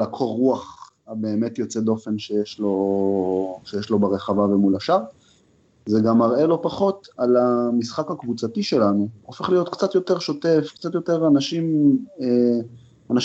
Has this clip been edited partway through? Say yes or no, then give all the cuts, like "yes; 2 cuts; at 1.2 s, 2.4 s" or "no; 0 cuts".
no; 0 cuts